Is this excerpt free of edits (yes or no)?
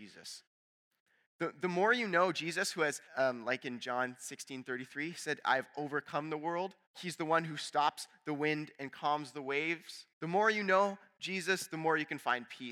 no